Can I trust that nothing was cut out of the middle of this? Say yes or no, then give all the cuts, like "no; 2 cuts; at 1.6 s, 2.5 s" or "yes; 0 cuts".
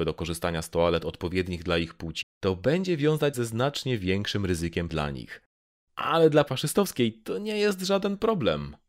no; 4 cuts; at 2.2 s, 3.3 s, 4.9 s, 6.5 s